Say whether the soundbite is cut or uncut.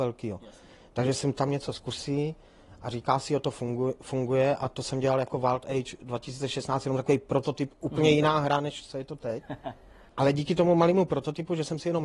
uncut